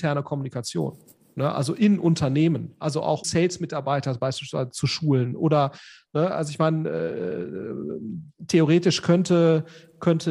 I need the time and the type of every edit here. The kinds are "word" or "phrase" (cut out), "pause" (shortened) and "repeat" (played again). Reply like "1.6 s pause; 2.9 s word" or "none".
3.2 s word